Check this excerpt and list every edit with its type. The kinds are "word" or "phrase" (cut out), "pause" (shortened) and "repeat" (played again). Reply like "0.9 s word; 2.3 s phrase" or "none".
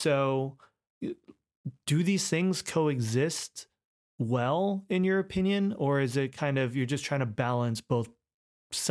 none